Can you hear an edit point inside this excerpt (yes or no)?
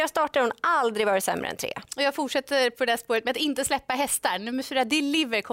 yes